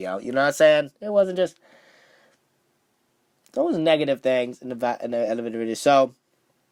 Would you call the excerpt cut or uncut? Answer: uncut